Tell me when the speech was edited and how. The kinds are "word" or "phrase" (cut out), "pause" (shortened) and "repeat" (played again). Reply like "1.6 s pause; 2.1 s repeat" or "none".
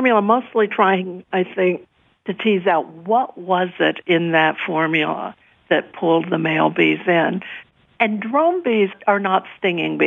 none